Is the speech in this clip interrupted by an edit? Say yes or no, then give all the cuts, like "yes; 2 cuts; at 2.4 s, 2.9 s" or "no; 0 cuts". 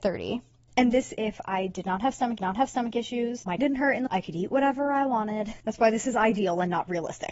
yes; 4 cuts; at 1.2 s, 2.4 s, 3.6 s, 4.1 s